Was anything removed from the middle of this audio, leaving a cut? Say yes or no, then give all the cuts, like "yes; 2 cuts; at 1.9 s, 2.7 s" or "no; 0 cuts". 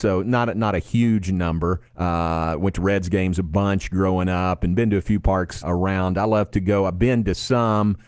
yes; 2 cuts; at 1.9 s, 5.6 s